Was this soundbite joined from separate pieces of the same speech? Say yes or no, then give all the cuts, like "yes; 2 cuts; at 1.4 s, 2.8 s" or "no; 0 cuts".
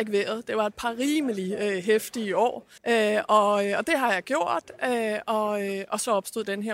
yes; 1 cut; at 2.8 s